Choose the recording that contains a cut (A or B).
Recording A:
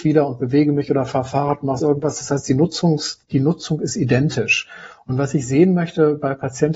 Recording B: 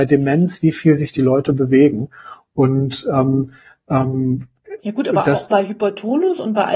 A